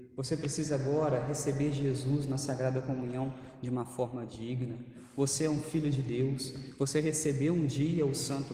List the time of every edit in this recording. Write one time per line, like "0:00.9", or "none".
none